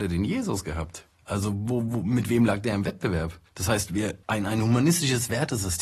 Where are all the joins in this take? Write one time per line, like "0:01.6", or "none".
0:01.1
0:03.5
0:04.2